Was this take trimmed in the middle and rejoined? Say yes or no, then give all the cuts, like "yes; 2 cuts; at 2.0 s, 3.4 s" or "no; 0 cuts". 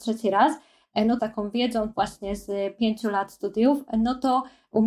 yes; 2 cuts; at 1.2 s, 1.9 s